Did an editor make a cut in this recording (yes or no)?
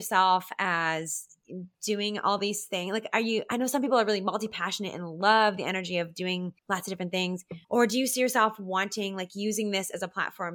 yes